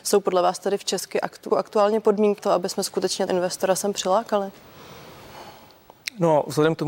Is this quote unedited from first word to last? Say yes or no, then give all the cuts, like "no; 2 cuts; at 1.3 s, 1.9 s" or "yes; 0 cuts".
no; 3 cuts; at 1.5 s, 2.4 s, 3.3 s